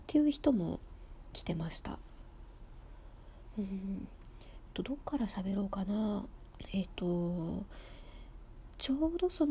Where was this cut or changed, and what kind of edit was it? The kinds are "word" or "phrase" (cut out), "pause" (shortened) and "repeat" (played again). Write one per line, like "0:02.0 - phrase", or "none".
0:04.7 - phrase